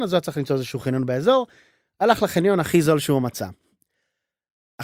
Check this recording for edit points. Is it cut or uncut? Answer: uncut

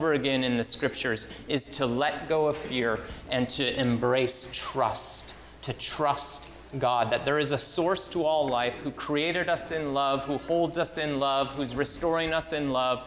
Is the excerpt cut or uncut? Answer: uncut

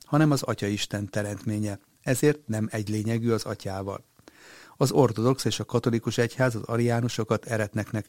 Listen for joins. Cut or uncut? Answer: uncut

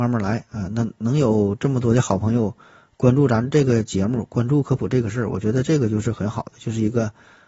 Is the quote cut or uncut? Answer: uncut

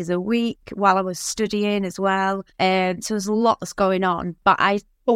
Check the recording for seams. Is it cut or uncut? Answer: cut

